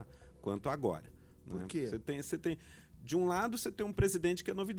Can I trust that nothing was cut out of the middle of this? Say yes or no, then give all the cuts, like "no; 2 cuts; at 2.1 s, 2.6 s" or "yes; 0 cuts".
yes; 0 cuts